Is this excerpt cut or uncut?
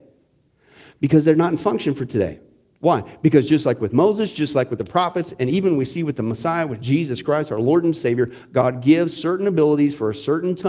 uncut